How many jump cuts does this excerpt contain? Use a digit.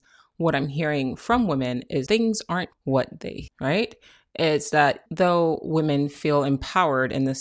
4